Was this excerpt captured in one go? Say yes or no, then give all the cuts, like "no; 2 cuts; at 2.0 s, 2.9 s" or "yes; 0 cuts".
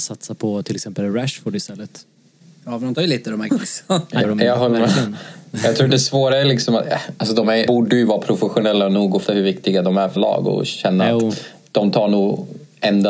no; 6 cuts; at 2.9 s, 3.5 s, 4.2 s, 7.7 s, 9.2 s, 10.2 s